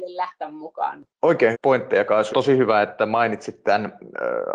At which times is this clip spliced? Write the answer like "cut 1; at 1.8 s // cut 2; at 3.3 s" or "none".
cut 1; at 1.5 s // cut 2; at 2.3 s